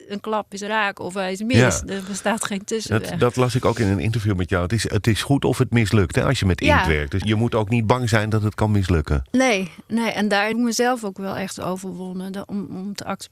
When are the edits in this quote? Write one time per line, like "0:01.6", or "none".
0:07.2
0:10.5

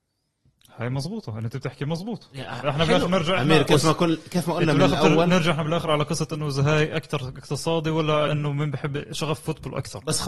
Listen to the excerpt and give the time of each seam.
0:08.3

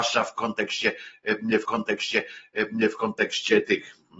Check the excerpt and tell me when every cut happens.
0:01.6

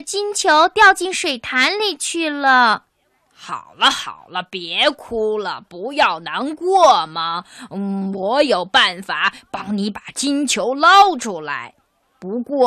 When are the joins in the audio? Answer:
0:02.9

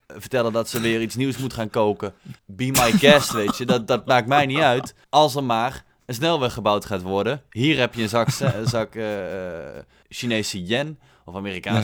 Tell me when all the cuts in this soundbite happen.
0:02.4
0:05.0
0:10.0

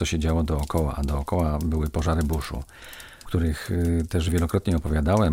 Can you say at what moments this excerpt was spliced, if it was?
0:03.2

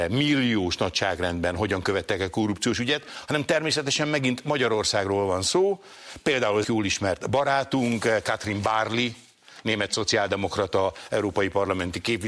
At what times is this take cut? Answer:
0:06.6

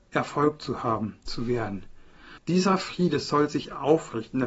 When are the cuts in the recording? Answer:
0:01.3
0:02.4

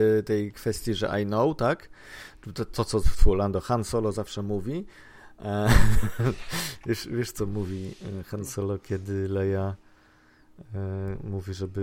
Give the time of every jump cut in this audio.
0:03.0

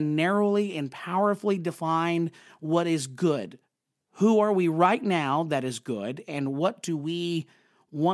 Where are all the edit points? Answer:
none

